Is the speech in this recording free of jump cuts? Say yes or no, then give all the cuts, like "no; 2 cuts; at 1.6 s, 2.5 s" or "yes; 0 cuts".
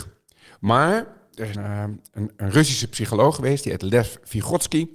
no; 2 cuts; at 1.5 s, 2.4 s